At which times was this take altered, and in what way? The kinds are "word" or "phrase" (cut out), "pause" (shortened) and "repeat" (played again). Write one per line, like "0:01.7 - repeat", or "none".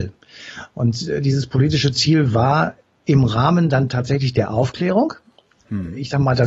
none

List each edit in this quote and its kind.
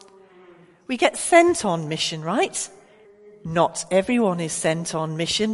0:03.1 - pause

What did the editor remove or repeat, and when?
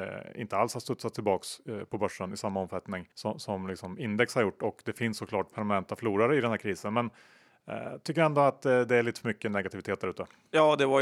0:03.1 - pause

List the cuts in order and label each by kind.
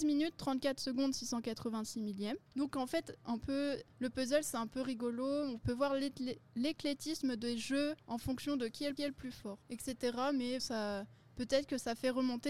0:02.5 - pause
0:03.9 - pause
0:08.0 - pause
0:09.0 - repeat
0:09.6 - pause
0:10.6 - word

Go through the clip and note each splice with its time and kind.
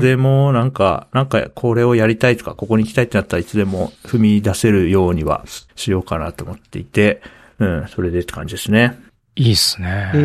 0:04.0 - pause
0:05.7 - pause

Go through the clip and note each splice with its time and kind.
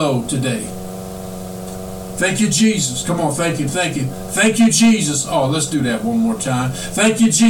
none

